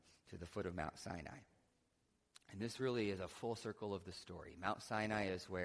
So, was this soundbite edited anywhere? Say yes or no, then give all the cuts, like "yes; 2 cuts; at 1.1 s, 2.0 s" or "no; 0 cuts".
no; 0 cuts